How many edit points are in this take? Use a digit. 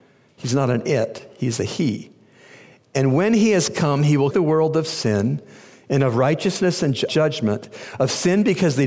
2